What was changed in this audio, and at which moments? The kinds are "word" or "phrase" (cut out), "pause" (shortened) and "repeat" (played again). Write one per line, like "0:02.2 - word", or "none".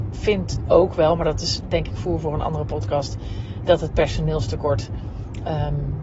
none

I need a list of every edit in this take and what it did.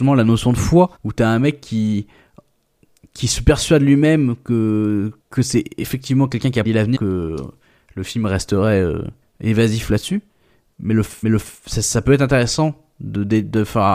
0:01.0 - pause
0:05.2 - pause
0:06.6 - word
0:06.9 - word
0:09.2 - pause
0:11.2 - repeat

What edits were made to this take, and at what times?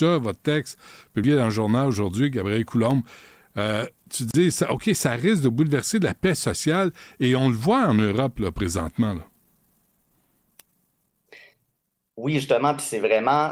none

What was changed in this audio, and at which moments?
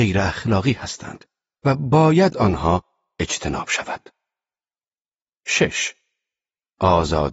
0:02.3 - word

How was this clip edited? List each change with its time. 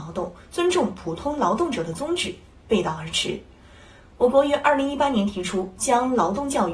none

